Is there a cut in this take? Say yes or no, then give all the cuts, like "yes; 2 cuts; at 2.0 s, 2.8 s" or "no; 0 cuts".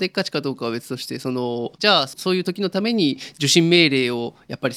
yes; 1 cut; at 1.7 s